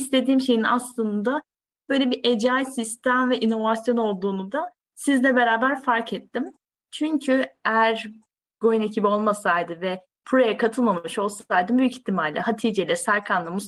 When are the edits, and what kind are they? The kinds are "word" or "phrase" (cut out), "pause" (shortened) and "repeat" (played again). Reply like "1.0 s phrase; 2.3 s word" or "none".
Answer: none